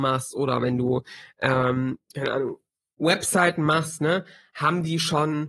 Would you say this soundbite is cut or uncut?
uncut